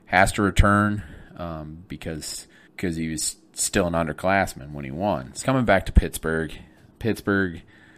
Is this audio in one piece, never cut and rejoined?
no; 2 cuts; at 2.7 s, 5.4 s

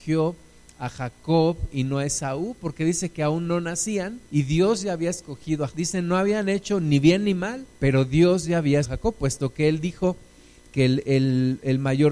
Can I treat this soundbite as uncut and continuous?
no; 4 cuts; at 4.3 s, 5.7 s, 7.7 s, 8.8 s

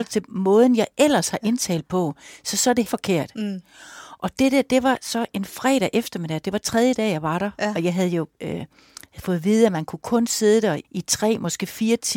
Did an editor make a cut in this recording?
yes; 2 cuts; at 2.9 s, 10.8 s

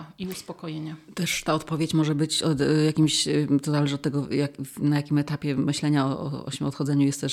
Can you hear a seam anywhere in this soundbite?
no; 0 cuts

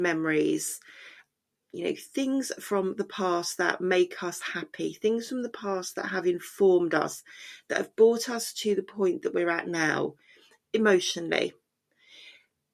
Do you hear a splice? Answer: no; 0 cuts

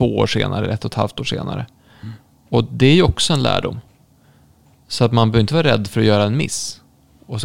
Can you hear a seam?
no; 0 cuts

